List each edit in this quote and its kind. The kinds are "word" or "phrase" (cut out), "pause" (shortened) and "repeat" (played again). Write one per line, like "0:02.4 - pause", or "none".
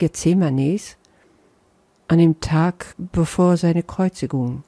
0:02.9 - pause